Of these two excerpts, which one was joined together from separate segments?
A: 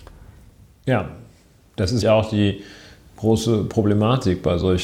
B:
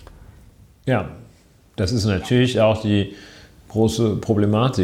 A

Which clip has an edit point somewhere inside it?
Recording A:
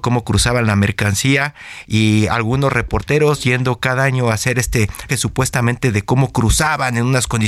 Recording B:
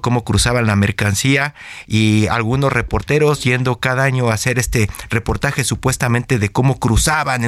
A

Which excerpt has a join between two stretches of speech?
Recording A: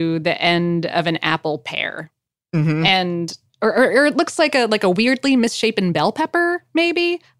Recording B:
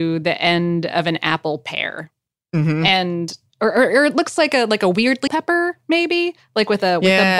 B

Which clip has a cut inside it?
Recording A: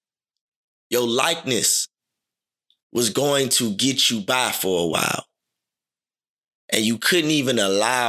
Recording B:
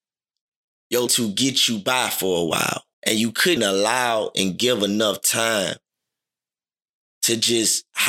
B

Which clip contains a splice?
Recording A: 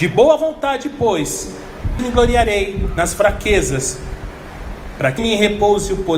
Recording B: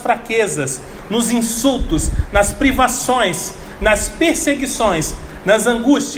A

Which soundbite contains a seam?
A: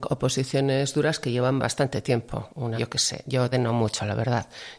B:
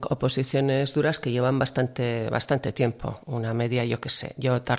A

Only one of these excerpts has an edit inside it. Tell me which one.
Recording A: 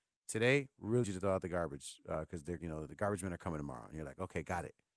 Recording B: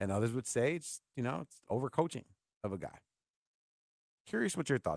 A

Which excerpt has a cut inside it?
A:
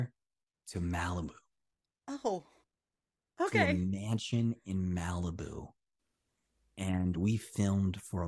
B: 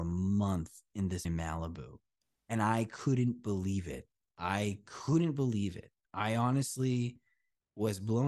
B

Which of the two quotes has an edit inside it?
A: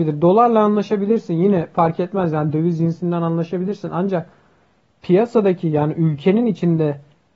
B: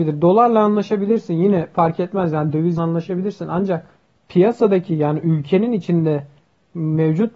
B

